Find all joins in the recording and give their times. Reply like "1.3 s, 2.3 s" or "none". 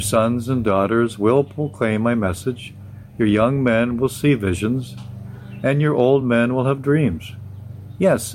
none